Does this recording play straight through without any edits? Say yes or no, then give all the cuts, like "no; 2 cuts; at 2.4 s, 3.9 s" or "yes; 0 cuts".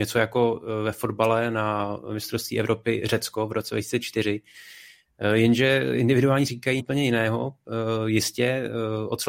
no; 2 cuts; at 6.5 s, 6.8 s